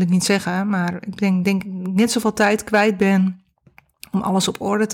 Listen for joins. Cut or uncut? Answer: uncut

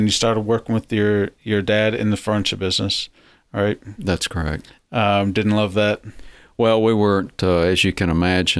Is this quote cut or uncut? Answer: uncut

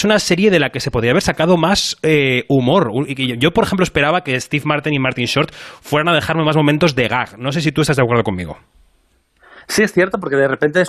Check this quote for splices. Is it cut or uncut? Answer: uncut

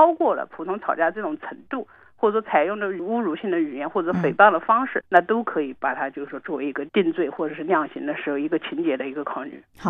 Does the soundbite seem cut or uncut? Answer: cut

